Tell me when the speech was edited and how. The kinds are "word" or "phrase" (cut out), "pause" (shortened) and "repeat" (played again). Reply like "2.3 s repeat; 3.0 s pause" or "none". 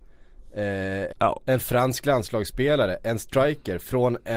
1.1 s phrase